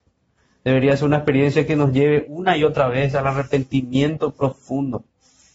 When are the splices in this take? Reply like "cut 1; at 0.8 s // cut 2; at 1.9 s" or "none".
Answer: none